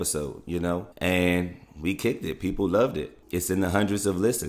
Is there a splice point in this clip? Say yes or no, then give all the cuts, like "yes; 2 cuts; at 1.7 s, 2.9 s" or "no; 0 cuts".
yes; 2 cuts; at 0.9 s, 3.2 s